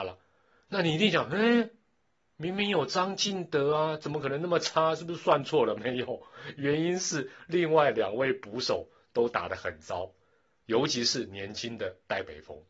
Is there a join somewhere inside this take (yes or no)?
no